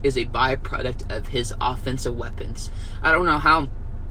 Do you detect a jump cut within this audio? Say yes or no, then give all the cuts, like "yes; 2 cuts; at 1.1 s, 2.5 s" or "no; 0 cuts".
no; 0 cuts